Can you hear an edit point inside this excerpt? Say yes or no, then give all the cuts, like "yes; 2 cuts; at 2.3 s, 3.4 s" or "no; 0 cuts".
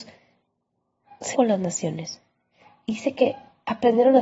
yes; 1 cut; at 1.3 s